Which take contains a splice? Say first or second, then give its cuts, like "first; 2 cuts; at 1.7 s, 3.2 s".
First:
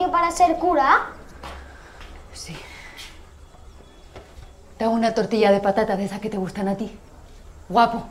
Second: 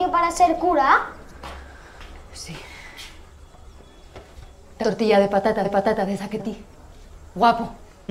second; 3 cuts; at 4.8 s, 5.6 s, 6.4 s